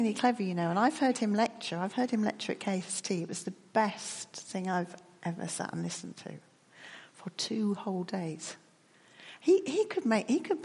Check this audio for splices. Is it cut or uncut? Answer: uncut